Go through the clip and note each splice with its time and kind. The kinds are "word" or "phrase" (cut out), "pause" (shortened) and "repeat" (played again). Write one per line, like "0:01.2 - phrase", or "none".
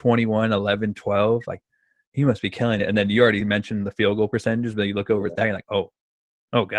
none